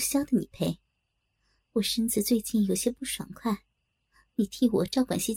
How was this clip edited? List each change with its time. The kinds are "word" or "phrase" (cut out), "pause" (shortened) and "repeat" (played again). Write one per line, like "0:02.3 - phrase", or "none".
none

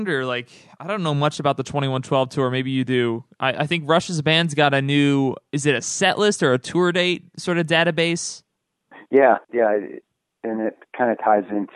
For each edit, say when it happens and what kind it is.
0:09.4 - pause

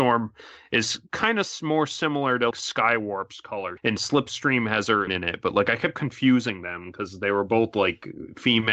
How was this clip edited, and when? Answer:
0:02.5 - word
0:03.8 - phrase
0:05.1 - phrase

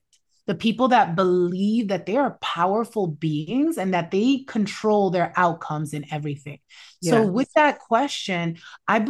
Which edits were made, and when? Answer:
none

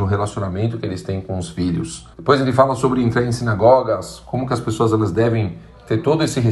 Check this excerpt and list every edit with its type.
0:02.1 - pause

